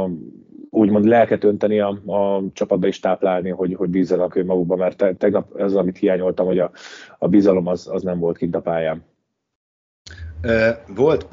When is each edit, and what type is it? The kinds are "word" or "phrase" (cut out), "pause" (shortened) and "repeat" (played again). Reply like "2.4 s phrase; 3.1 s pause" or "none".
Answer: none